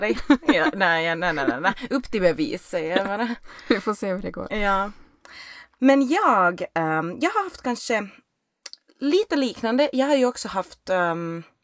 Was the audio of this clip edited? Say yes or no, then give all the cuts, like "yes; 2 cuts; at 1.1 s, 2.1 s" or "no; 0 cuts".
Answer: no; 0 cuts